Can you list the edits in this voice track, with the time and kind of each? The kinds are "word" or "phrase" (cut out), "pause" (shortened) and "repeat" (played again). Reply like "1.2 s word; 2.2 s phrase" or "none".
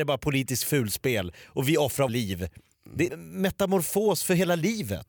2.1 s word; 3.1 s phrase